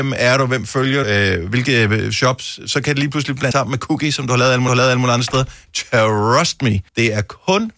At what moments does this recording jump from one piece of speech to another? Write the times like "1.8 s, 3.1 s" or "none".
1.0 s, 3.5 s, 4.7 s, 6.9 s

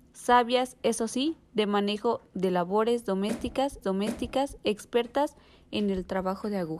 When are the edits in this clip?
3.8 s

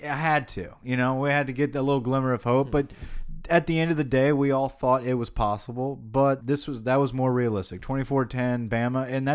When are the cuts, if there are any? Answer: 6.4 s

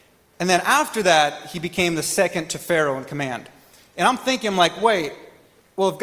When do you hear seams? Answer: none

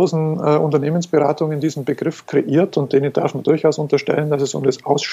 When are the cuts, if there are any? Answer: none

